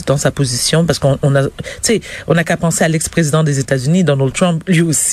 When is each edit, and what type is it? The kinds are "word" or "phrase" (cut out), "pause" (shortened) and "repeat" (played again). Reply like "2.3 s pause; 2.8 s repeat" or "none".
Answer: none